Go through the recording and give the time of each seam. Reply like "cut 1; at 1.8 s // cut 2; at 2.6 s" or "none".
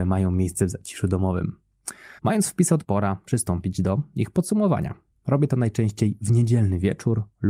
cut 1; at 2.2 s // cut 2; at 2.8 s